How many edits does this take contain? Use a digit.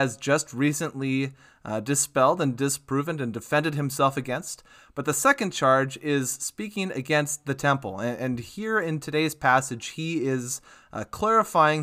0